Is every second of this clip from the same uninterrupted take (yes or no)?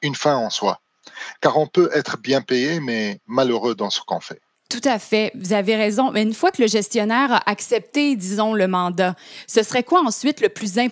no